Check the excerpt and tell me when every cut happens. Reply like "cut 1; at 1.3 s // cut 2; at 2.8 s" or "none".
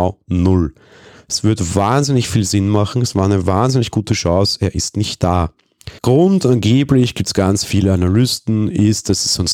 cut 1; at 6.0 s